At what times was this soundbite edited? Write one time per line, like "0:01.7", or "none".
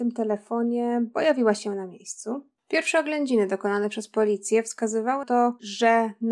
0:05.2